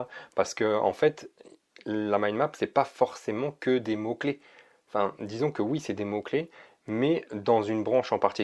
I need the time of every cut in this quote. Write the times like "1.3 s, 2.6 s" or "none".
none